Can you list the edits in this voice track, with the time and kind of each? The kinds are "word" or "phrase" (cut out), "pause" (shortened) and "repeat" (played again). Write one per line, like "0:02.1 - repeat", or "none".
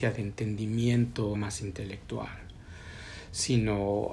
0:01.3 - word